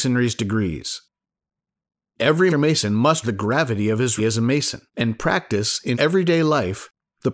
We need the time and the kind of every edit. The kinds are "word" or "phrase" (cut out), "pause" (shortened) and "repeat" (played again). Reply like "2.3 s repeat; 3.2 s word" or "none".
2.5 s word; 3.2 s word; 4.2 s word; 4.9 s pause; 5.9 s word